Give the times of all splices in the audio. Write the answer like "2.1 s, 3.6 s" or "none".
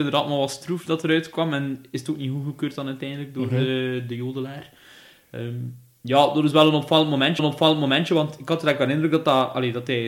7.4 s